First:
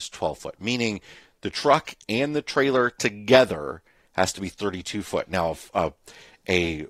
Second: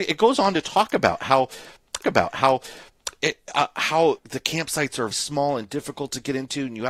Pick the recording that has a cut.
second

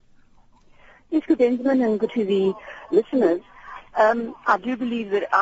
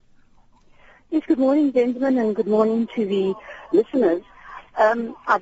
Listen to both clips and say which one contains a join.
first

